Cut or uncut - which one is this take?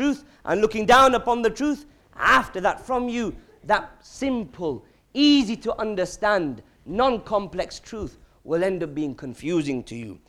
uncut